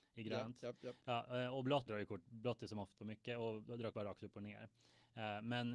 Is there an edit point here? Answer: yes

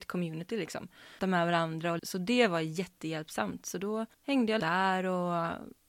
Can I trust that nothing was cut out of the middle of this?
no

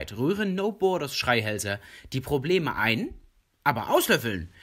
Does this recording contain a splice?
no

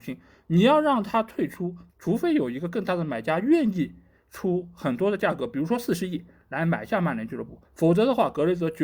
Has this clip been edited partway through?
yes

